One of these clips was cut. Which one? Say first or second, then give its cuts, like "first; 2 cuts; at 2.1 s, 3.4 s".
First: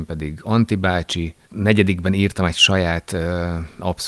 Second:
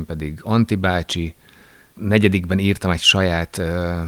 first; 1 cut; at 1.4 s